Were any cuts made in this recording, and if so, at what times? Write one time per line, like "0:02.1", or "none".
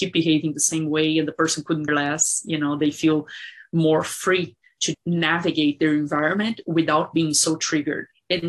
0:01.9
0:04.9